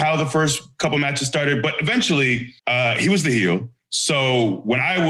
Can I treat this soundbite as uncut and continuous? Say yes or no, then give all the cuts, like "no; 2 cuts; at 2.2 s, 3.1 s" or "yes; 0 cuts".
no; 1 cut; at 2.6 s